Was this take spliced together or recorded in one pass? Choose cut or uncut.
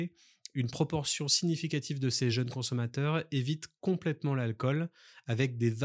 uncut